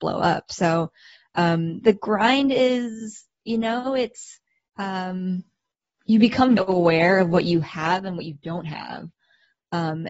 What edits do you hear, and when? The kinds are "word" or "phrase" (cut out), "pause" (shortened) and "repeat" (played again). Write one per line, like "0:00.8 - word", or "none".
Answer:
0:04.7 - word
0:06.6 - word